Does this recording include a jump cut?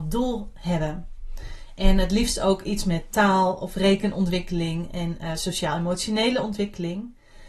no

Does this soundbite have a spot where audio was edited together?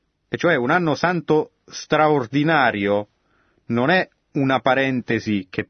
no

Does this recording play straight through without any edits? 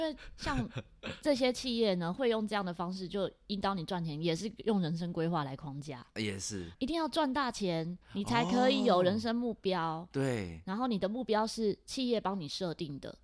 no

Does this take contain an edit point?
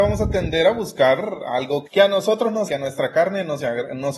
yes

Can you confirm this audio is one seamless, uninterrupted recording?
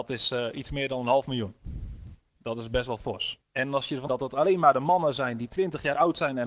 no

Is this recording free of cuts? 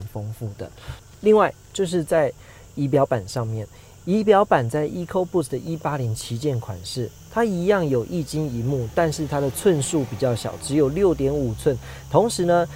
yes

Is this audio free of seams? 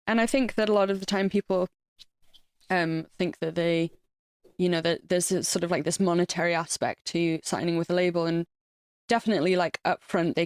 yes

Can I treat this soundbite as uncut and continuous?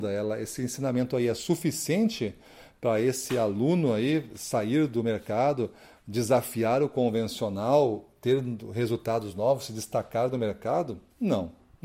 yes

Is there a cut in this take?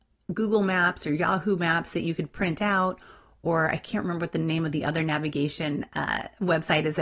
no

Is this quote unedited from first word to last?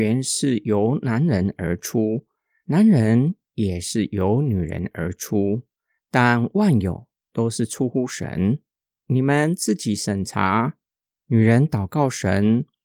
yes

